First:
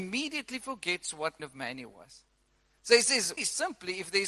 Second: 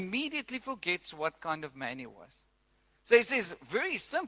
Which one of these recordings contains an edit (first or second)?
first